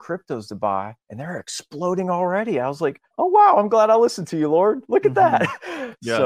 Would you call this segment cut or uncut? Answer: cut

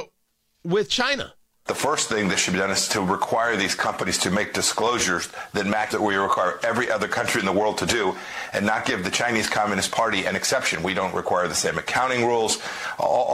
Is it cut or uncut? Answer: cut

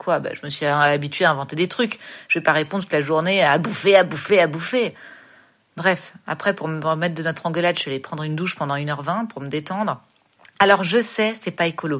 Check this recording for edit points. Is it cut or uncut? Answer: uncut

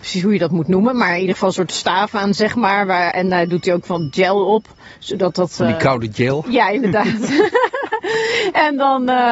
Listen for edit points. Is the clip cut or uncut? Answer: uncut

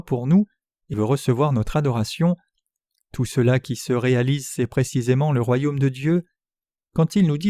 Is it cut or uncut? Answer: cut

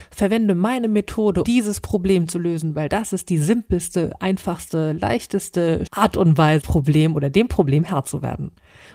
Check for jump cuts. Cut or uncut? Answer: cut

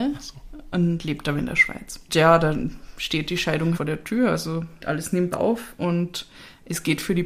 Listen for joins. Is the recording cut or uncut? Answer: cut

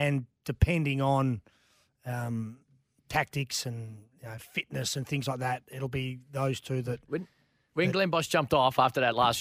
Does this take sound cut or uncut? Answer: uncut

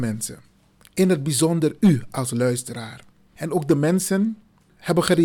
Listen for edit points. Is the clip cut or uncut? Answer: uncut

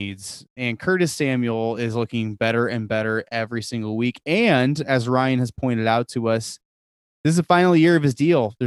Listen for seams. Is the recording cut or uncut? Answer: uncut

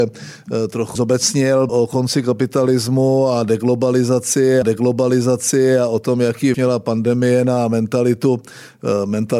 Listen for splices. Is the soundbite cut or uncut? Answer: cut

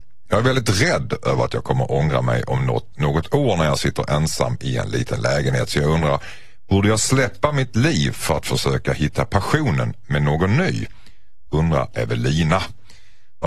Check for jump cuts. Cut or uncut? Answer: uncut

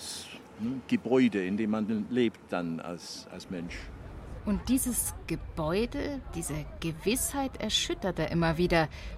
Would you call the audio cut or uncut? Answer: uncut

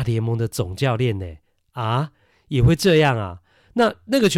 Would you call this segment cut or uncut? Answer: uncut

